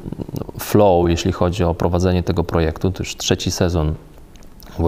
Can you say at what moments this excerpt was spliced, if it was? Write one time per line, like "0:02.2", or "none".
none